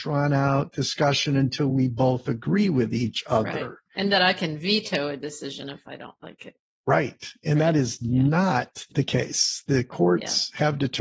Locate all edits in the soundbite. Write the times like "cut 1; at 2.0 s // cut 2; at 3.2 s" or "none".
none